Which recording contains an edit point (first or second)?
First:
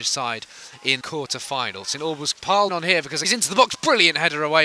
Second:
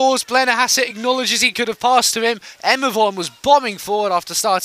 first